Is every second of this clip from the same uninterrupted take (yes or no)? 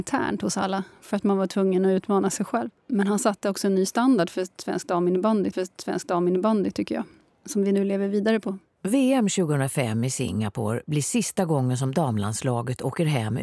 no